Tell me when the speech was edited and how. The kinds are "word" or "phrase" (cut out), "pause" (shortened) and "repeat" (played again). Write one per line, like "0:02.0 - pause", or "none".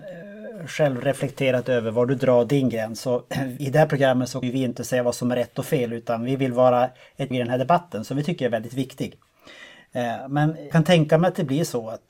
0:03.6 - word
0:04.4 - word
0:07.3 - word
0:10.7 - word

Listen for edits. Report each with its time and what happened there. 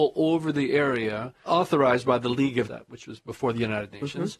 0:01.5 - word
0:02.7 - word

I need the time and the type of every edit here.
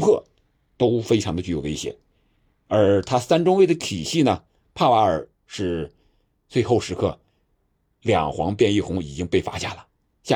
none

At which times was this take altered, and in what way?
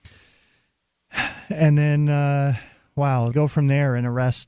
0:03.3 - word

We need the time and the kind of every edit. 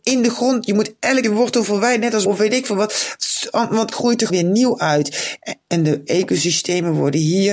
0:01.2 - word
0:02.3 - word
0:03.9 - word
0:04.3 - word
0:06.1 - word

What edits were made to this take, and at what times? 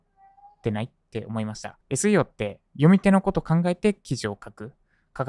0:01.8 - pause
0:02.7 - pause

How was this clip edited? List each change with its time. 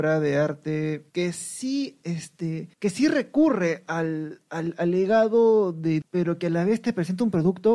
0:01.1 - pause
0:02.7 - pause
0:06.0 - phrase

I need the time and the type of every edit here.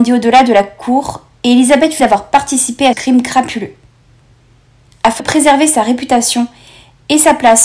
0:02.0 - word
0:02.9 - word
0:05.2 - word

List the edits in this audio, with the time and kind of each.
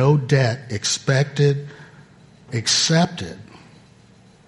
0:02.5 - word

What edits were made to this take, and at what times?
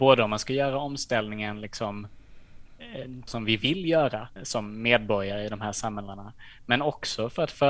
0:03.3 - phrase
0:04.4 - word

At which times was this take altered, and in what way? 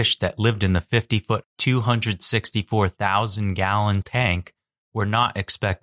0:01.4 - word
0:04.0 - word

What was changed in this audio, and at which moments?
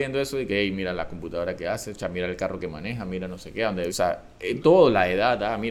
0:03.9 - phrase

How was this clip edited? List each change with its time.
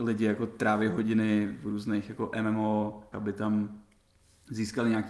0:03.1 - word

